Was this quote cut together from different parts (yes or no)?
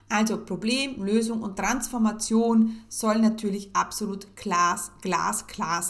no